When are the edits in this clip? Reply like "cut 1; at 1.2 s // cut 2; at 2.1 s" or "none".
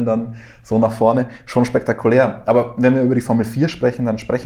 none